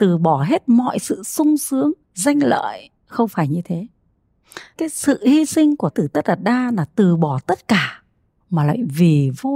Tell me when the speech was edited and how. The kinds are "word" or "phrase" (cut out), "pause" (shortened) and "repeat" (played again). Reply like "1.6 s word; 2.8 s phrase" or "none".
2.0 s pause; 3.0 s pause; 4.8 s phrase; 5.9 s word